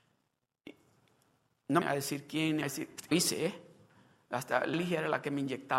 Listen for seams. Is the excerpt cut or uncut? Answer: cut